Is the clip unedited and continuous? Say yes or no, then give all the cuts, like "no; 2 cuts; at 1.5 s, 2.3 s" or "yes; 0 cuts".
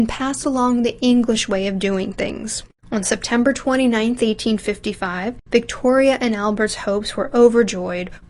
no; 1 cut; at 2.8 s